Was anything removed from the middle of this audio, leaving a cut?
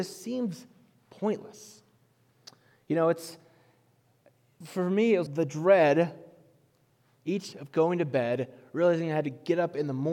yes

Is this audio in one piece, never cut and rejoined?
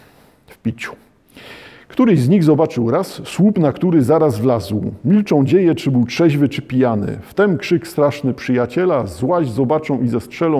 yes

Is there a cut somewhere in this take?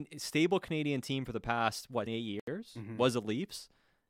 yes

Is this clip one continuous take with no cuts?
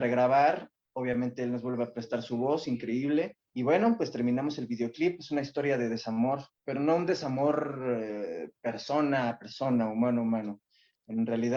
no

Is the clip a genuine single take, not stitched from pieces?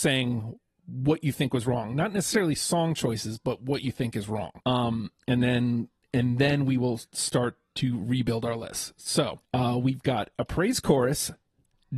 no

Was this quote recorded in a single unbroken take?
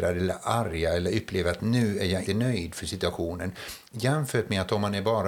no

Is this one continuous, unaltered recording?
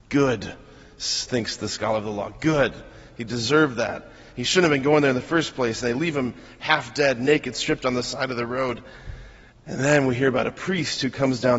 no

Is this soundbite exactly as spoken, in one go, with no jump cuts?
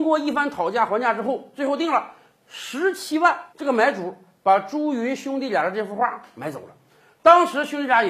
no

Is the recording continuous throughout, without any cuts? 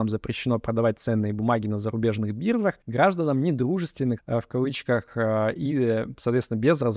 no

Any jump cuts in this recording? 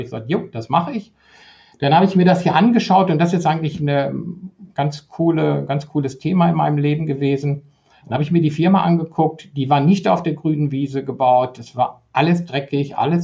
no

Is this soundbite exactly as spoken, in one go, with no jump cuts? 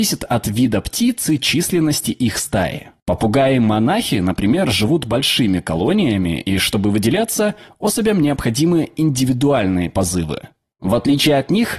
yes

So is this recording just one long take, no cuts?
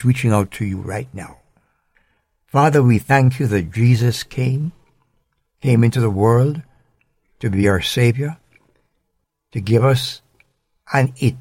yes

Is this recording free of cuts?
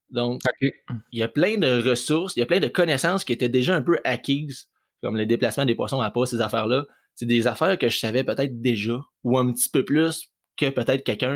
yes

